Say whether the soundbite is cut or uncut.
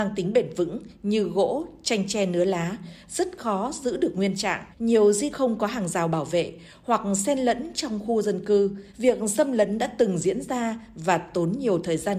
cut